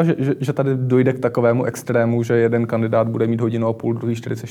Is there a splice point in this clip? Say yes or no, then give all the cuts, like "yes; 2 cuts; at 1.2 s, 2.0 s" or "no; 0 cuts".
no; 0 cuts